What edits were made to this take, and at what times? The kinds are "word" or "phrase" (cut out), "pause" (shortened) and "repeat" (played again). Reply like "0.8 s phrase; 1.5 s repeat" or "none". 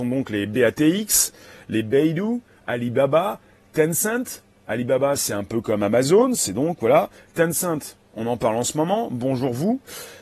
none